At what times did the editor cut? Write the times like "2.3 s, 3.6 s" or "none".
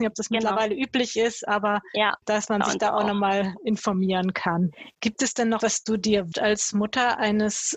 2.2 s, 4.9 s, 5.6 s, 6.3 s